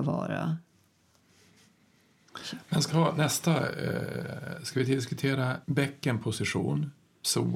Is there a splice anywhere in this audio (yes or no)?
yes